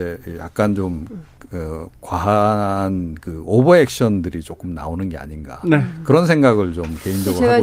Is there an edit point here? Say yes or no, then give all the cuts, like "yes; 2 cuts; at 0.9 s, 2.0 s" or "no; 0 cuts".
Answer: no; 0 cuts